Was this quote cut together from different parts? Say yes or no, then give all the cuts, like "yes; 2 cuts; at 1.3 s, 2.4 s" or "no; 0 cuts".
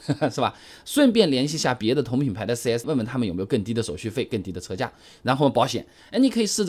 yes; 1 cut; at 2.8 s